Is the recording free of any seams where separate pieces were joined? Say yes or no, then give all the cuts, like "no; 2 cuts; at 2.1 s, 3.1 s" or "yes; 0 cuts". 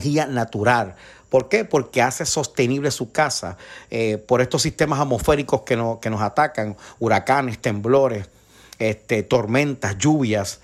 yes; 0 cuts